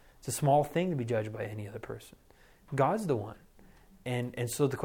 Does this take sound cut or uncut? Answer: uncut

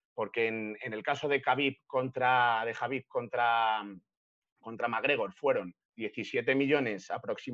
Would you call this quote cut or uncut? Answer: uncut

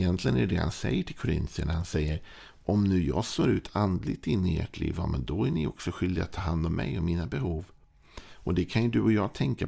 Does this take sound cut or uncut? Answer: uncut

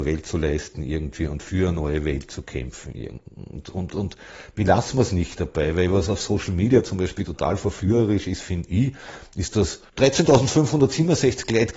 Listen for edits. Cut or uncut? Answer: cut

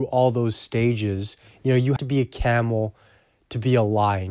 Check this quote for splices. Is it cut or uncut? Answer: cut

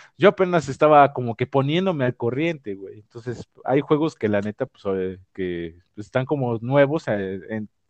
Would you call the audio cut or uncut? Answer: uncut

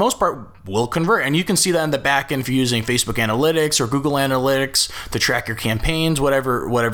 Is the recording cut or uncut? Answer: uncut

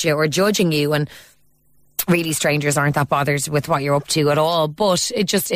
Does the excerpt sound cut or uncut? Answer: uncut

